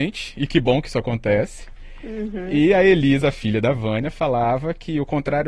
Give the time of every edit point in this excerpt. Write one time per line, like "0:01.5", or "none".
none